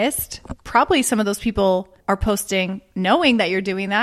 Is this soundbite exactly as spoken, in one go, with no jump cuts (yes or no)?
no